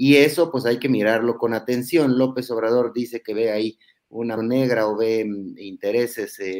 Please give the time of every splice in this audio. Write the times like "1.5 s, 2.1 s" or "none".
4.4 s